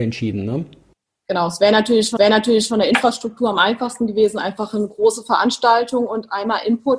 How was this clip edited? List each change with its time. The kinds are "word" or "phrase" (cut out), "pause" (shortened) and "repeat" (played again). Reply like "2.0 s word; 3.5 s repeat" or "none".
2.2 s repeat